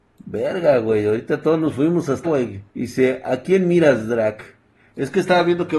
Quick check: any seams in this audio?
yes; 2 cuts; at 2.2 s, 2.7 s

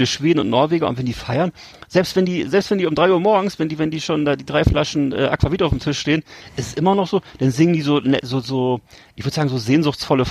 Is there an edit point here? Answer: no; 0 cuts

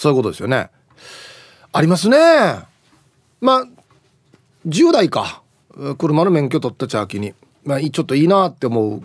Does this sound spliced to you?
no; 0 cuts

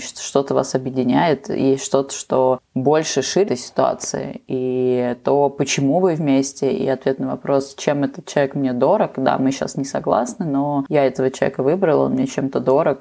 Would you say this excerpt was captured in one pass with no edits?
no; 1 cut; at 3.5 s

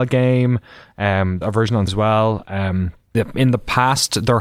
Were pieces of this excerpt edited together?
yes; 3 cuts; at 1.4 s, 1.9 s, 3.1 s

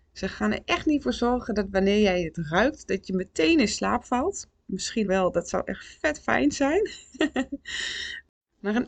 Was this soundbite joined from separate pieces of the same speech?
yes; 1 cut; at 5.0 s

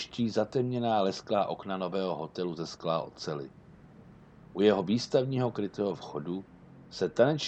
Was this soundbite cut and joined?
no; 0 cuts

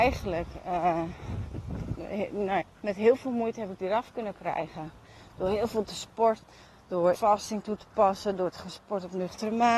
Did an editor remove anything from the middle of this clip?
yes; 3 cuts; at 2.6 s, 6.4 s, 7.1 s

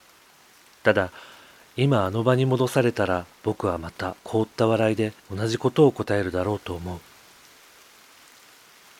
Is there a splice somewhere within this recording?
yes; 3 cuts; at 3.3 s, 4.2 s, 5.2 s

